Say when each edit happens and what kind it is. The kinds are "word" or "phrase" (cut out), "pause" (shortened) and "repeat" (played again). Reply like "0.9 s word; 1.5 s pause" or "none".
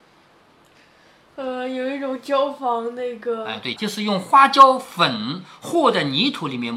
3.8 s phrase